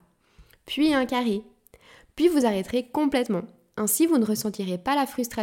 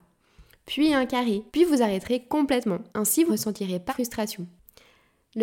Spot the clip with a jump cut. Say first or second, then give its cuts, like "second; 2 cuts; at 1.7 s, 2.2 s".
second; 4 cuts; at 1.5 s, 2.9 s, 3.3 s, 3.9 s